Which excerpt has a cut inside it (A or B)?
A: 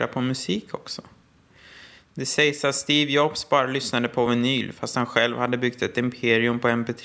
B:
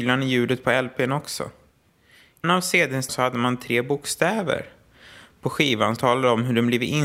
B